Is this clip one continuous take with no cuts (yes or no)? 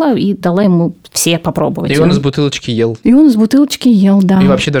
yes